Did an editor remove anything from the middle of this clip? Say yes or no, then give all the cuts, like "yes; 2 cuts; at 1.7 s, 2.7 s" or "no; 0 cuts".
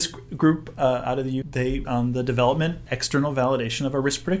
yes; 3 cuts; at 1.4 s, 1.8 s, 2.9 s